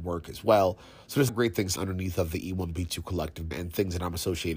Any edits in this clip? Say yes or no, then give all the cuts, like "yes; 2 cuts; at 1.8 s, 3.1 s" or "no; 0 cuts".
yes; 3 cuts; at 1.3 s, 1.8 s, 3.5 s